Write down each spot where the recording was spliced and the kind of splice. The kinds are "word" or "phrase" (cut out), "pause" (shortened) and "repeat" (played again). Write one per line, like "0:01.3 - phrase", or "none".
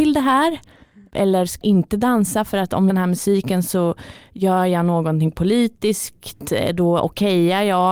0:01.6 - word
0:02.9 - phrase